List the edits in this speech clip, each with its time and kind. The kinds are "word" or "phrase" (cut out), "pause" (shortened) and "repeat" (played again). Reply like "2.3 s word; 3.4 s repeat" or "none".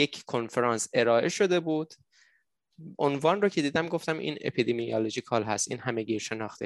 3.0 s word

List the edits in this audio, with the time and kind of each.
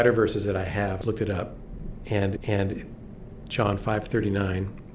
1.0 s word; 2.4 s repeat

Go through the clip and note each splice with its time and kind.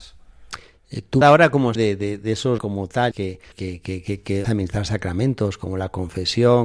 1.2 s word; 1.8 s word; 2.6 s phrase; 3.1 s phrase; 3.5 s word; 4.4 s word

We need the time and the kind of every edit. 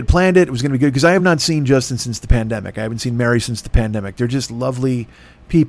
none

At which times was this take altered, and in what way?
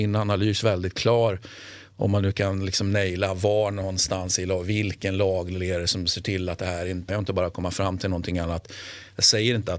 7.1 s phrase

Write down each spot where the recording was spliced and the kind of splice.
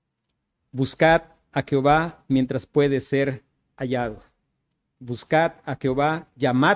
none

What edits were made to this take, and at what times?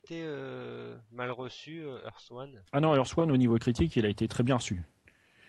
2.7 s pause

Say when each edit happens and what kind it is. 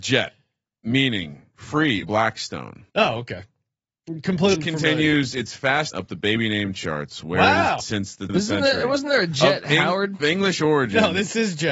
2.0 s word; 2.9 s pause; 4.5 s word; 5.9 s word; 7.8 s word; 8.3 s word; 10.2 s word

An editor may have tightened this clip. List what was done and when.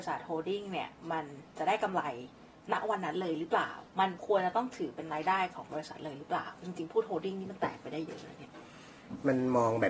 3.9 s pause

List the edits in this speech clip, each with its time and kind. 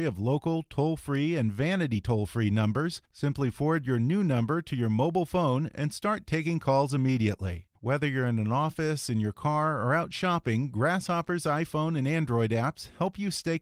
3.1 s pause; 7.8 s pause

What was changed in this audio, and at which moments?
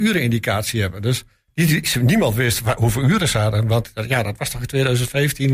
none

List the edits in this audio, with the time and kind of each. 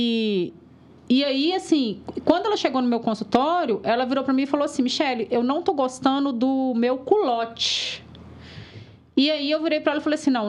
none

